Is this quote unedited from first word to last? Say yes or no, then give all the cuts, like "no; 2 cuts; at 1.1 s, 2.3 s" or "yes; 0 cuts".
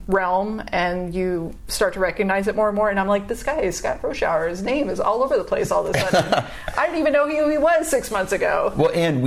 yes; 0 cuts